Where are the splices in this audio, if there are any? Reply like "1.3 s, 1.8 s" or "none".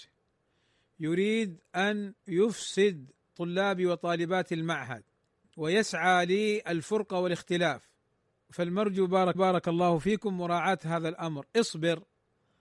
3.2 s, 9.3 s